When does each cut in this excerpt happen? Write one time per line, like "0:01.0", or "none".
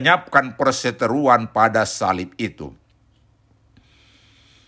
none